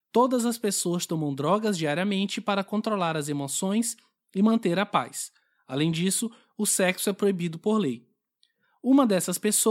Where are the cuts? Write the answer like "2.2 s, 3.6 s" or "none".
none